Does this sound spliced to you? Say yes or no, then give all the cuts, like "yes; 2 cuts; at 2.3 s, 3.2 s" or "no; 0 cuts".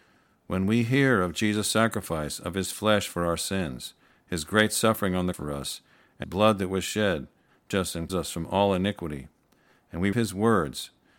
yes; 5 cuts; at 5.3 s, 6.2 s, 7.7 s, 8.1 s, 10.1 s